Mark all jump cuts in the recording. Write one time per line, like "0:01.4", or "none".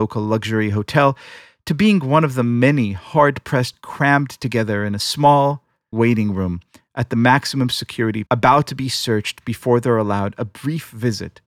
0:03.7
0:05.9
0:08.3